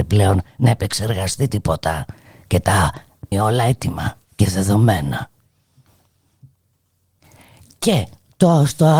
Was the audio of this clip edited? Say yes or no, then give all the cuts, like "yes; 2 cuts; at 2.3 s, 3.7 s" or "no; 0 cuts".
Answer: yes; 2 cuts; at 3.3 s, 4.2 s